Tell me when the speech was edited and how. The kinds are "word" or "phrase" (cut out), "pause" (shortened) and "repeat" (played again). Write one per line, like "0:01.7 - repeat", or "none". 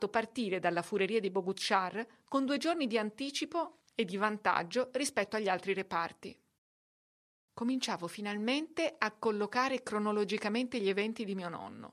none